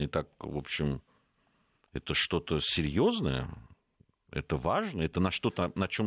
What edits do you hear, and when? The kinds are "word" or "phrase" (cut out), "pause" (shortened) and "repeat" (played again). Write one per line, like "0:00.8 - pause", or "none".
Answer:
none